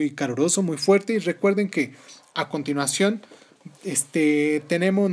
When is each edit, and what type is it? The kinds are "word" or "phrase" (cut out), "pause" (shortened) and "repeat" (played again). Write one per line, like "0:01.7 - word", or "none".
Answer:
0:03.7 - pause